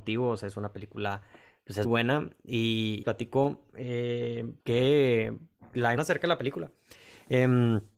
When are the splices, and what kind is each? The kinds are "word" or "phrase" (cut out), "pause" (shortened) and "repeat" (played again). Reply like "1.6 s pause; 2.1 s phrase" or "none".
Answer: 1.8 s word; 3.0 s phrase; 4.6 s pause; 6.0 s word